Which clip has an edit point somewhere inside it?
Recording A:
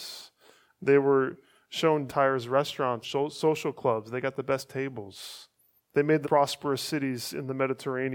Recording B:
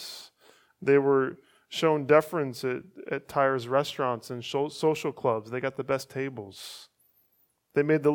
A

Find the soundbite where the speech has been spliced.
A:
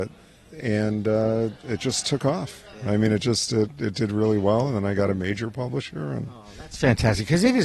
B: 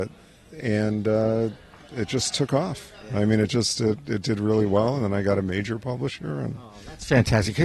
A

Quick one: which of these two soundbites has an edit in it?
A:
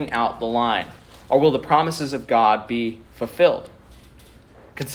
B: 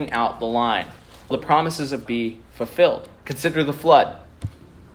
B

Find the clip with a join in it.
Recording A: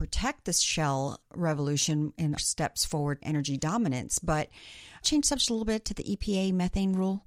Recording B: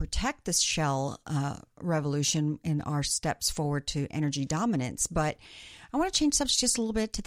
A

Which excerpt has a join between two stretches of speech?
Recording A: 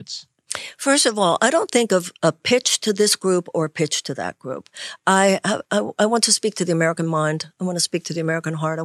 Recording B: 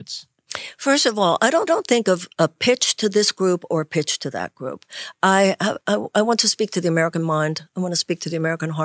B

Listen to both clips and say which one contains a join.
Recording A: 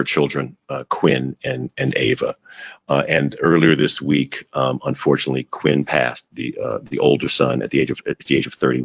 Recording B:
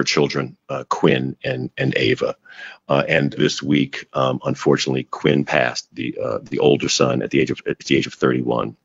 B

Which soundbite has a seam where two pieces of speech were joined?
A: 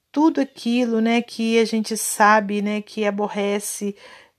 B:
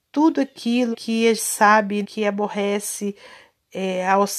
B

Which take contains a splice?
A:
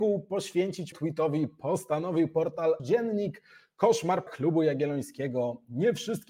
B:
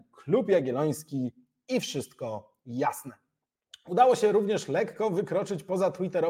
A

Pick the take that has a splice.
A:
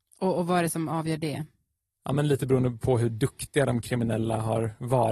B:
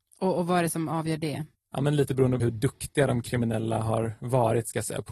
B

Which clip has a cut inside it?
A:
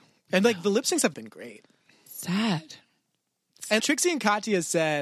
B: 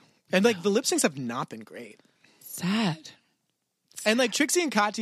A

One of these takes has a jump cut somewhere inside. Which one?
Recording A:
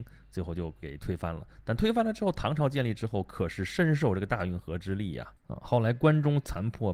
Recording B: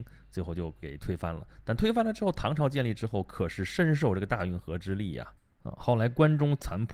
A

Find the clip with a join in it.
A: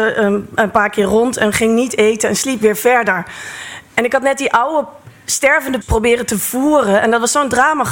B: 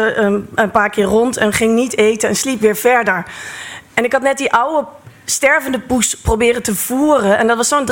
A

